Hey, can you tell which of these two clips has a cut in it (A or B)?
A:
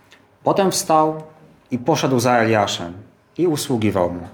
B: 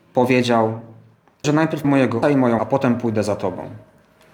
B